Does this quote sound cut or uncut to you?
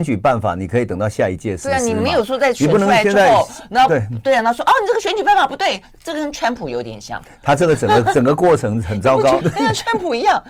cut